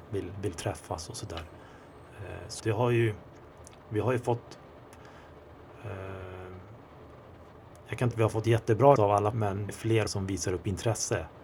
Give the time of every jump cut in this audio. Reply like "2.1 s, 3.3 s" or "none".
2.6 s, 8.1 s, 9.0 s, 9.3 s, 9.7 s, 10.1 s